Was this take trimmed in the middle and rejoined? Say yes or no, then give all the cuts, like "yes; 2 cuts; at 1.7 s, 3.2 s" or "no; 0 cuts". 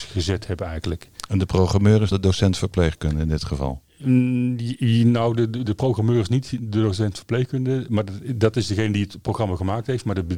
yes; 2 cuts; at 2.1 s, 5.7 s